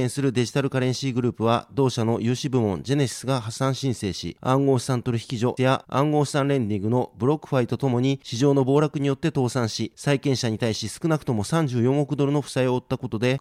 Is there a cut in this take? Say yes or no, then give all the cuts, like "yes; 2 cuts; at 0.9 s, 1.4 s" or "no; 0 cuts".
yes; 1 cut; at 5.6 s